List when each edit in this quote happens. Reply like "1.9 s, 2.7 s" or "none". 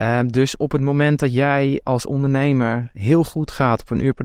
1.8 s

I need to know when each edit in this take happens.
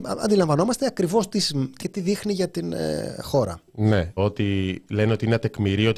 1.8 s, 4.2 s

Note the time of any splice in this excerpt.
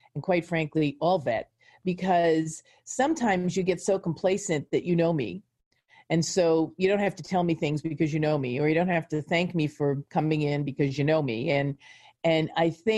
none

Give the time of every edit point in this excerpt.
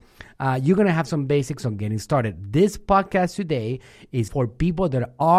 4.3 s

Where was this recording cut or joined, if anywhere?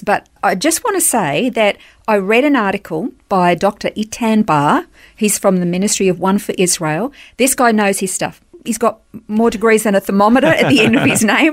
none

